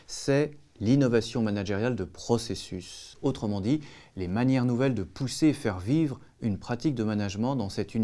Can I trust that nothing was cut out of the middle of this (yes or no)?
yes